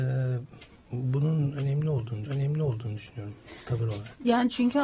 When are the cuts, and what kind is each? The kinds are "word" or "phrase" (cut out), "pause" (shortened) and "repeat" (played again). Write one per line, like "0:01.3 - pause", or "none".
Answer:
0:02.3 - repeat